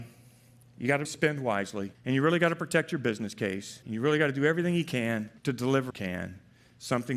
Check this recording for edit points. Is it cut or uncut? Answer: cut